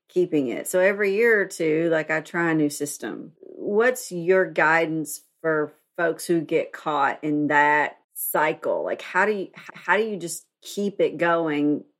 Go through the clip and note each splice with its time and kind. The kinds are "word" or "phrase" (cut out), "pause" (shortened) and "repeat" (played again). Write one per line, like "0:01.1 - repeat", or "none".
0:03.4 - pause
0:08.0 - pause
0:09.7 - repeat